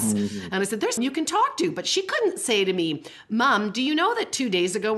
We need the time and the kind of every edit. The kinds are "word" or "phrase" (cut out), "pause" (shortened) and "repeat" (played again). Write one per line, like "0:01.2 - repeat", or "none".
0:01.0 - word